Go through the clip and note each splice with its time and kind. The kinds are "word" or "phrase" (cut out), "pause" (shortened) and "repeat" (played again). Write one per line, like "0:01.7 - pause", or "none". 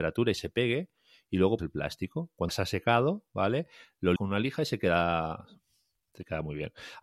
0:01.6 - word
0:02.5 - word
0:04.2 - word